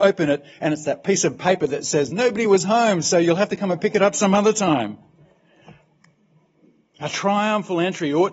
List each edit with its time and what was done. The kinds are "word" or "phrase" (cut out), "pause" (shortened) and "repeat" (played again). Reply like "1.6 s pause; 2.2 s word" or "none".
none